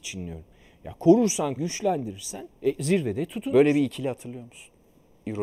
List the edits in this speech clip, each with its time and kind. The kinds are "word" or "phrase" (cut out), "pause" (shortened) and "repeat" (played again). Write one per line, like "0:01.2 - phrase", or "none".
0:01.6 - word
0:02.5 - pause